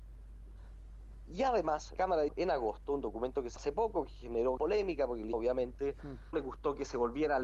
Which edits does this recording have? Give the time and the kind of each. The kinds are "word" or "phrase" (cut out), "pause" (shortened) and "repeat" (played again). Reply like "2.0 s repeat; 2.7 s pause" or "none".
2.0 s word; 2.3 s word; 3.6 s word; 4.6 s word; 5.3 s word; 6.3 s word